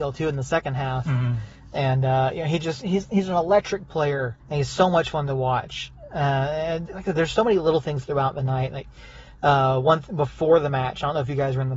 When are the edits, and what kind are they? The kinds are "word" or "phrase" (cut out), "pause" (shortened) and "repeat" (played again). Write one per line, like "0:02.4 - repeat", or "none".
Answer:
0:04.4 - pause
0:06.9 - word